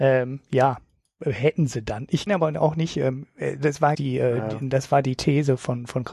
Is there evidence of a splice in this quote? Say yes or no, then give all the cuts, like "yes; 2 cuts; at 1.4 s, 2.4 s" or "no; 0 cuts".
yes; 2 cuts; at 2.3 s, 3.9 s